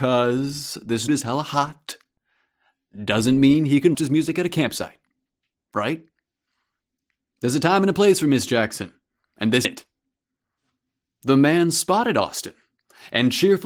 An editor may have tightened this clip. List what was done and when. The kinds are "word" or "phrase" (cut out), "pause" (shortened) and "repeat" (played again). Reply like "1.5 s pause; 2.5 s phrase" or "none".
1.1 s word; 3.9 s word; 9.6 s word